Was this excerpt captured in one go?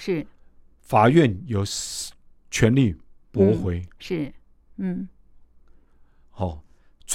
yes; 0 cuts

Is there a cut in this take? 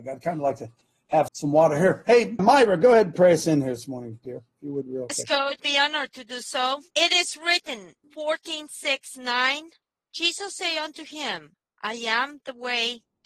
yes; 6 cuts; at 1.3 s, 2.4 s, 5.6 s, 6.9 s, 8.0 s, 9.8 s

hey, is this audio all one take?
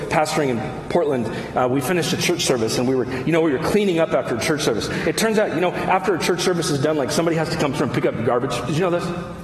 yes; 0 cuts

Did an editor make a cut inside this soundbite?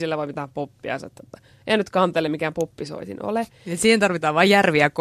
no; 0 cuts

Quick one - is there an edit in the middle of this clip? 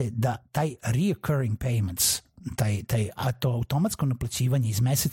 no; 0 cuts

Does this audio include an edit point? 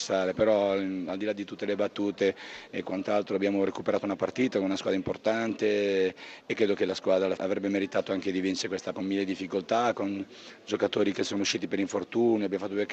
yes; 2 cuts; at 7.4 s, 8.9 s

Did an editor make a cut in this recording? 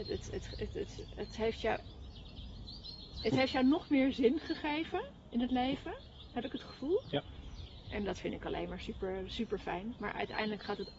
no; 0 cuts

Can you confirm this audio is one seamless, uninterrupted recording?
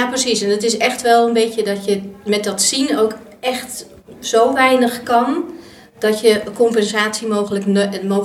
yes; 0 cuts

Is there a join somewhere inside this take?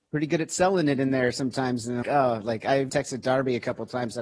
yes; 2 cuts; at 2.0 s, 2.9 s

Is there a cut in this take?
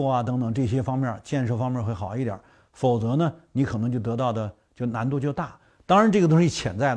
no; 0 cuts

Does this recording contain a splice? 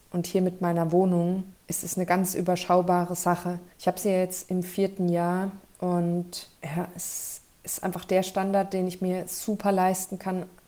yes; 3 cuts; at 1.6 s, 3.7 s, 6.6 s

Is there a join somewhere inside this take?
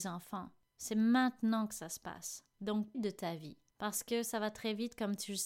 yes; 1 cut; at 2.9 s

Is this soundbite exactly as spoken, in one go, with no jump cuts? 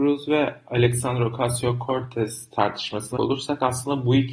no; 1 cut; at 3.2 s

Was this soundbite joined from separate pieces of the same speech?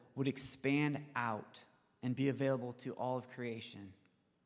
no; 0 cuts

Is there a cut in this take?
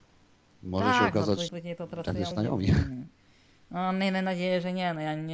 yes; 2 cuts; at 1.5 s, 2.3 s

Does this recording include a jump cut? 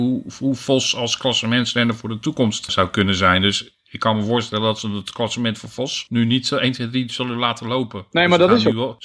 no; 0 cuts

